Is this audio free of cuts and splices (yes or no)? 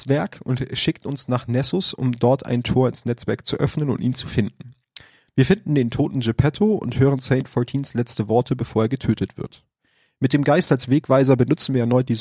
yes